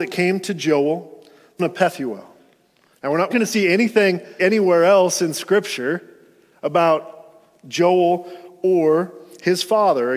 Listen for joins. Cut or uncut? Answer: cut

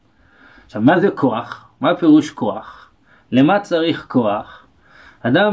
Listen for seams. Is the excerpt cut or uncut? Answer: uncut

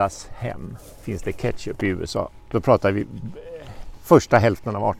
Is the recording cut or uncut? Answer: uncut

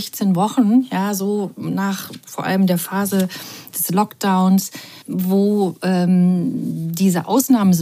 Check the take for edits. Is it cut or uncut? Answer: cut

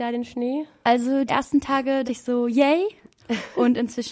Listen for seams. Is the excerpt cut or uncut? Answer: cut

